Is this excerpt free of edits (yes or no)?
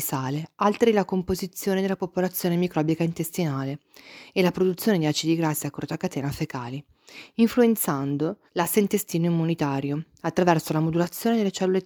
no